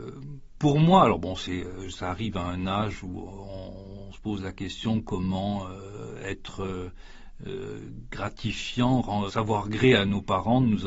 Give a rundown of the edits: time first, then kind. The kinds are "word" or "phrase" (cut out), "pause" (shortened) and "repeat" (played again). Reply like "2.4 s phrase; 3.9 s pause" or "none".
9.3 s word